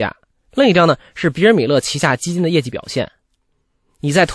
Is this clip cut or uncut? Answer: uncut